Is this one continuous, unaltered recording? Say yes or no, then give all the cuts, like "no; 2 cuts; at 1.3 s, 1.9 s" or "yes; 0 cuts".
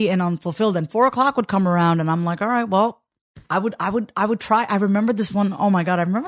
no; 1 cut; at 3.4 s